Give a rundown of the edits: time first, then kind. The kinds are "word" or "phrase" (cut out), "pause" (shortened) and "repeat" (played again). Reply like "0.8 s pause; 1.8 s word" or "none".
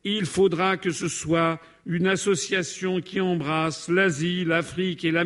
none